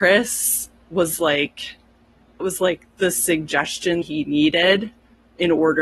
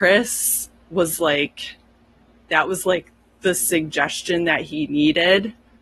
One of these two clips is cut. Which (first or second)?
first